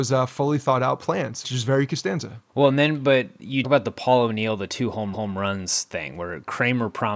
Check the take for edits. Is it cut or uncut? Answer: cut